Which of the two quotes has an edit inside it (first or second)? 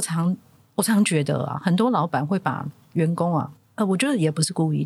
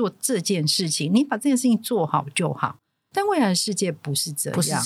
first